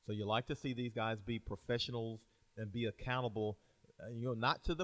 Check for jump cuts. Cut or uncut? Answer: uncut